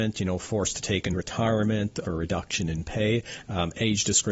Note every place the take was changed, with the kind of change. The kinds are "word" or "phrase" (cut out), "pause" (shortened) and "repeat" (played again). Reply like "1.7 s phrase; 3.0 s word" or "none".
1.1 s word; 2.0 s phrase